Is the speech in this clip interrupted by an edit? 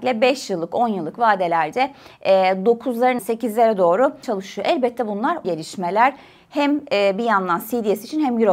yes; 3 cuts; at 3.2 s, 4.2 s, 5.4 s

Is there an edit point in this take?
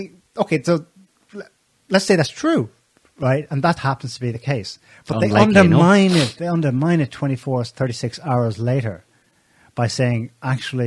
yes; 1 cut; at 3.8 s

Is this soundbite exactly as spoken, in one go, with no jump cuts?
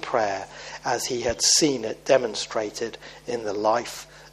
yes; 0 cuts

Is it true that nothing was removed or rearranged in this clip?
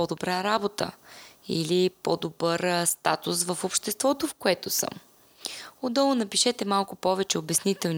yes; 0 cuts

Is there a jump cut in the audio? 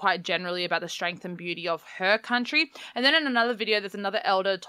no; 0 cuts

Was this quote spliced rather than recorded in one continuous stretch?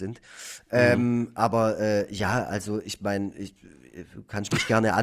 no; 0 cuts

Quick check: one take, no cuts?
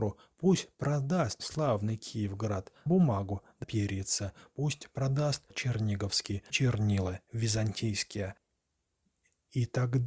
no; 5 cuts; at 1.4 s, 2.9 s, 3.6 s, 5.5 s, 6.5 s

